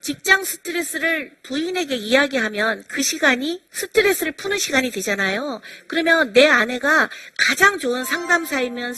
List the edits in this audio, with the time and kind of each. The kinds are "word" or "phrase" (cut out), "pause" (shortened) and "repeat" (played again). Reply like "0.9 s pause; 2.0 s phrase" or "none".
3.7 s pause